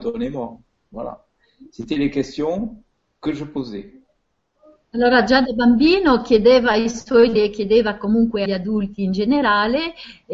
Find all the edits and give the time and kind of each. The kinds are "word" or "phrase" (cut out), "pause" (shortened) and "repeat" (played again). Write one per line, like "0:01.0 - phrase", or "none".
0:07.4 - word
0:08.5 - word